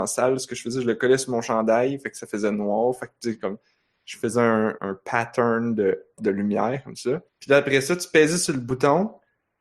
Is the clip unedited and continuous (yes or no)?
no